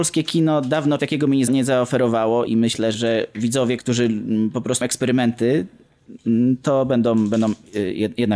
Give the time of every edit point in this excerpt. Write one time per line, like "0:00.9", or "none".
0:01.0
0:01.5
0:02.5
0:02.9
0:03.8
0:04.8